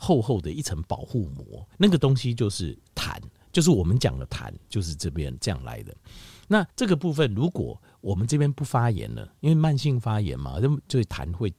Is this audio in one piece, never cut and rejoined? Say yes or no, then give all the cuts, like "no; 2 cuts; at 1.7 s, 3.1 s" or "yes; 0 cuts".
no; 2 cuts; at 1.7 s, 6.7 s